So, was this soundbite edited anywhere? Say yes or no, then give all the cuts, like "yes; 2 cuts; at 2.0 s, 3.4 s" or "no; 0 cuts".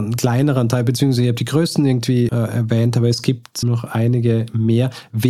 yes; 2 cuts; at 2.3 s, 3.6 s